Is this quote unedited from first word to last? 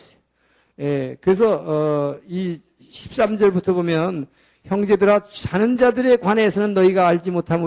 yes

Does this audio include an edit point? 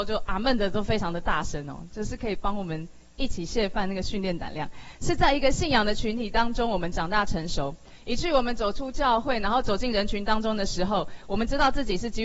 no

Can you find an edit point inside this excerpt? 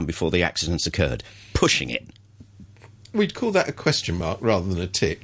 no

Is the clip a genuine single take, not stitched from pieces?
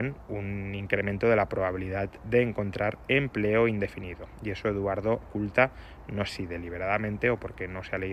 no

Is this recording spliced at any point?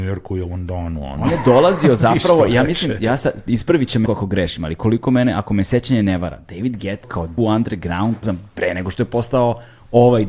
yes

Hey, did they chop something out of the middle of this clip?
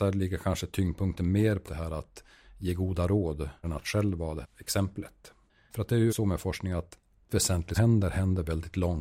yes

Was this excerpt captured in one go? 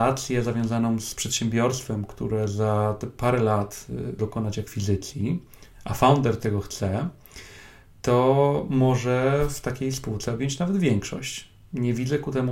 no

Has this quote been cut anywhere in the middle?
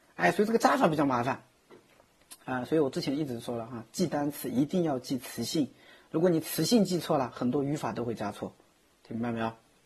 no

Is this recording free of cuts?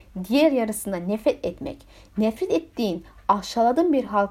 yes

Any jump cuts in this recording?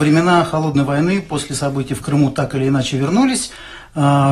no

